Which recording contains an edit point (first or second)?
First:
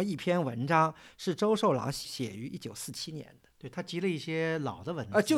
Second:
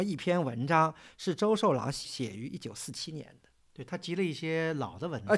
first